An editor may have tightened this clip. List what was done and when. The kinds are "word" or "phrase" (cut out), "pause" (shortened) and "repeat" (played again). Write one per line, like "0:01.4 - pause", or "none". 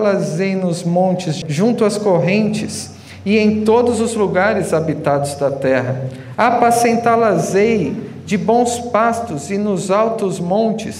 0:01.4 - word